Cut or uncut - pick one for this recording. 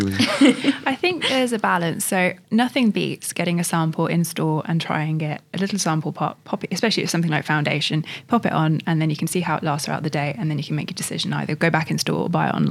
cut